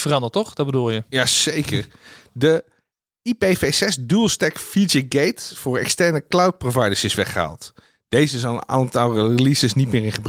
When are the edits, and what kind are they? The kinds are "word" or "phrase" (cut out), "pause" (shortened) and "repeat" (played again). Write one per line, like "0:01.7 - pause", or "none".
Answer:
none